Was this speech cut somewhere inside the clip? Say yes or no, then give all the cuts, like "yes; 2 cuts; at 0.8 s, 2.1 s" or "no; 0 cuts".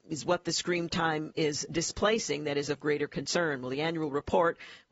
no; 0 cuts